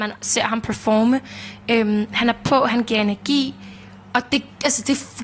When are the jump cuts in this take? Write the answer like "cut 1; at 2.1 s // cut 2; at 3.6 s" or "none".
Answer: none